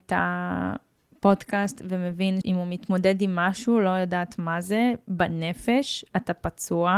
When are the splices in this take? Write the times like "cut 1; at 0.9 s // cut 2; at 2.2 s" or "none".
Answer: cut 1; at 2.4 s